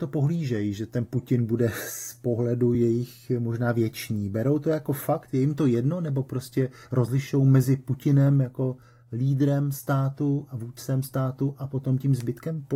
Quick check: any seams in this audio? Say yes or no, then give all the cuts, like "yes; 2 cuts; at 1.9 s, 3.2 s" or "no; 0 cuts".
no; 0 cuts